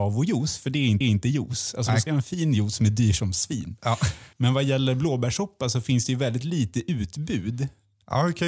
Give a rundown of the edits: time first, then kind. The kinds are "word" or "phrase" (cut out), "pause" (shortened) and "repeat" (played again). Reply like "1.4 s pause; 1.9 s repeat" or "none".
1.0 s repeat; 2.1 s phrase; 4.3 s pause

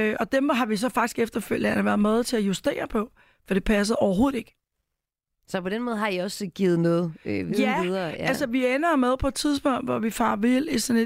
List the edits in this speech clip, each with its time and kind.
none

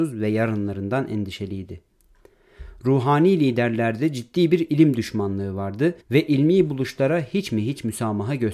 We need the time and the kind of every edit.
6.0 s pause

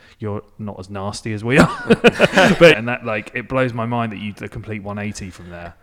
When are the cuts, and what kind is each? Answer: 2.7 s phrase; 4.4 s word

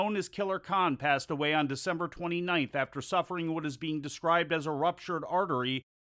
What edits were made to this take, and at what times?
none

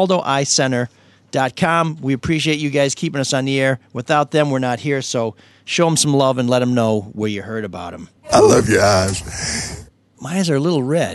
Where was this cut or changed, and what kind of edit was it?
none

